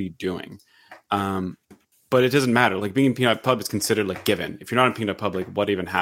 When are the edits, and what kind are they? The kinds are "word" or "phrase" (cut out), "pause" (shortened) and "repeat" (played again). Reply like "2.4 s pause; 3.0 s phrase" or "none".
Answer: none